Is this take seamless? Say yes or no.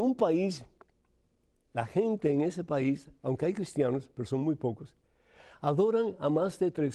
yes